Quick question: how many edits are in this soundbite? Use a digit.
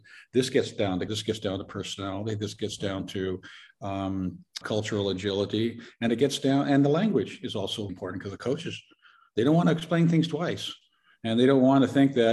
3